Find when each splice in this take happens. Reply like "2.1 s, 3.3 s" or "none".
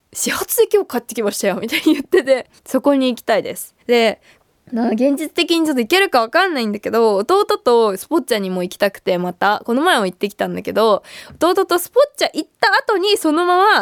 2.6 s, 3.8 s